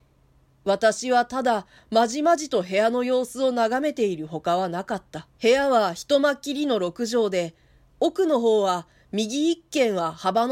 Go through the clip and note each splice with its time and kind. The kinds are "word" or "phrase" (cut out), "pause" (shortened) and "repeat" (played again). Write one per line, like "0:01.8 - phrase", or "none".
0:05.3 - pause